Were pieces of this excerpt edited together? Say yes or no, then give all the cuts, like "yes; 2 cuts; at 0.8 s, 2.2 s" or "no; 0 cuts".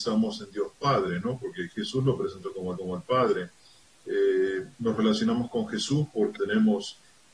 yes; 4 cuts; at 1.7 s, 2.8 s, 4.7 s, 6.4 s